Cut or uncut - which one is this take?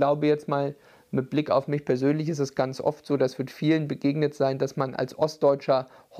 uncut